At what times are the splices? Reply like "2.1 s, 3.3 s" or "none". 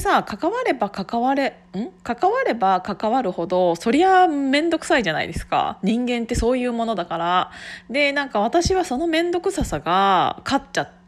none